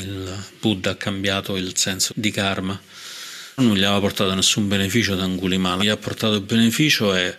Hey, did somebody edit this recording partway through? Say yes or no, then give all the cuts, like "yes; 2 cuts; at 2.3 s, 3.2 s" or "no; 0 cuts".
yes; 3 cuts; at 2.1 s, 3.6 s, 5.8 s